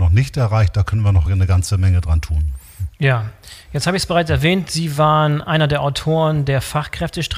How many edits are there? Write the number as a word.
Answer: zero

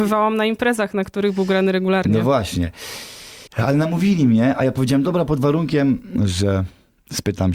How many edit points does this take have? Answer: one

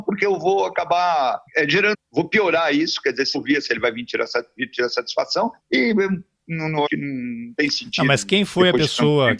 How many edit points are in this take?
six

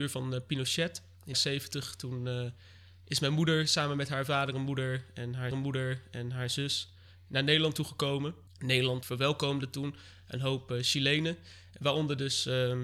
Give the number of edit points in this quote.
three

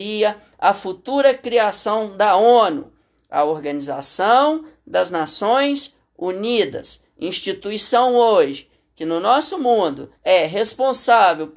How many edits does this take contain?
one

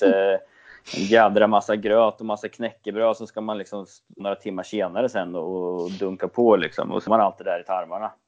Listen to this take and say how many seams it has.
two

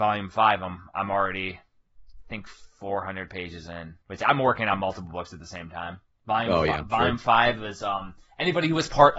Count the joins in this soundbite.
one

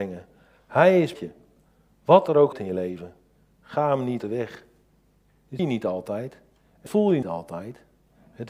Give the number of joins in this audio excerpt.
six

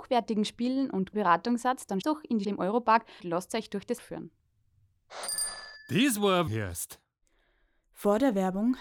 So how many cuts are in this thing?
six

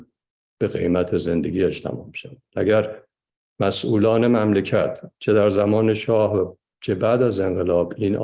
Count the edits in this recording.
zero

